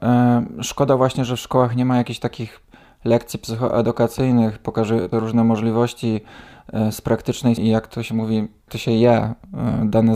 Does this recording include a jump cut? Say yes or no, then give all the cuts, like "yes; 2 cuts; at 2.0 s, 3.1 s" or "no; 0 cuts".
yes; 3 cuts; at 5.1 s, 7.6 s, 8.7 s